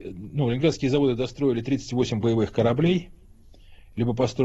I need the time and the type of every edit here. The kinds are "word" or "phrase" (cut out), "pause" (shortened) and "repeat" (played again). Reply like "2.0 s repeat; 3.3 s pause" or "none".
none